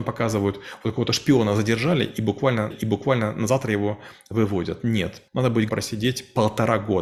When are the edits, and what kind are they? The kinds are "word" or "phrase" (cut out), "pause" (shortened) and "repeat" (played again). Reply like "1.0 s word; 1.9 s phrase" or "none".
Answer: 2.7 s repeat; 5.3 s pause; 5.7 s word